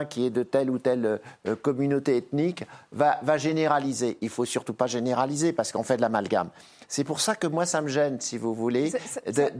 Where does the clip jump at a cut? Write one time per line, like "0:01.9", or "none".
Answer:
none